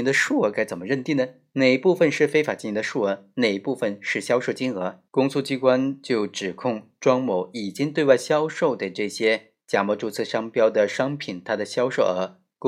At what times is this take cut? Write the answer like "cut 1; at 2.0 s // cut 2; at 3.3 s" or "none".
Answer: cut 1; at 5.1 s

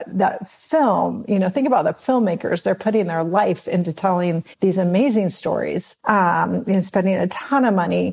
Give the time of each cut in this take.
cut 1; at 4.5 s // cut 2; at 6.0 s

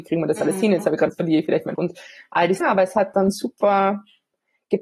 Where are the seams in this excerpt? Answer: cut 1; at 1.1 s // cut 2; at 1.8 s // cut 3; at 2.6 s

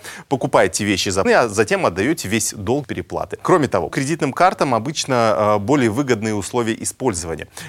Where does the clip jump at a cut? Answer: cut 1; at 1.2 s // cut 2; at 2.8 s // cut 3; at 3.9 s

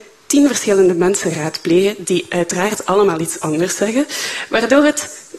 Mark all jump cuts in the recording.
none

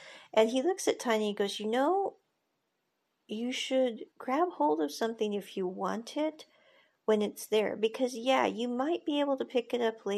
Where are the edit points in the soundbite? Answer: cut 1; at 4.1 s

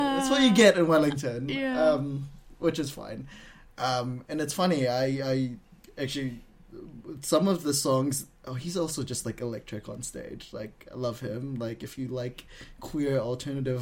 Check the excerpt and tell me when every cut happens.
none

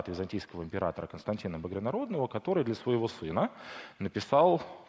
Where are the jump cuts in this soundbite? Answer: none

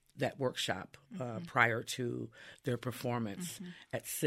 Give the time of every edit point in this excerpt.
none

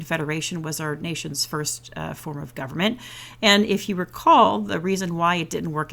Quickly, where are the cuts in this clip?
none

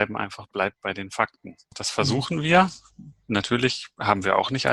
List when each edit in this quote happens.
none

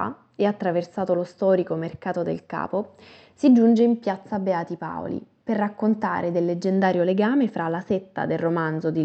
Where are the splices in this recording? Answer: none

